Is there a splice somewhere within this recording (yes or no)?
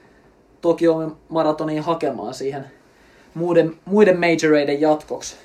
no